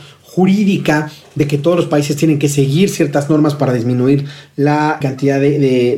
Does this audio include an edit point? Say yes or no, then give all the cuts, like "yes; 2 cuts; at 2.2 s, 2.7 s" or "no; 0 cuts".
yes; 1 cut; at 5.0 s